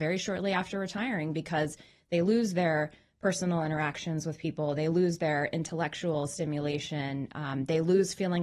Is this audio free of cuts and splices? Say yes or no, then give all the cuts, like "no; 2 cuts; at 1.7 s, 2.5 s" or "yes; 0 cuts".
yes; 0 cuts